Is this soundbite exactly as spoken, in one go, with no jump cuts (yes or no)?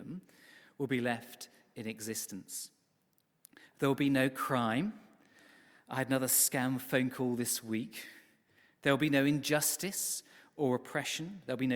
yes